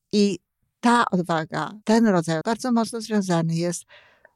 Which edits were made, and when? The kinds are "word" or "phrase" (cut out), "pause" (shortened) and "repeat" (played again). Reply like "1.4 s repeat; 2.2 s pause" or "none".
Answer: 1.8 s pause; 2.4 s word